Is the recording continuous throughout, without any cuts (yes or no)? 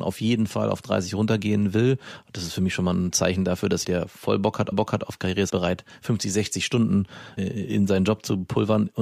no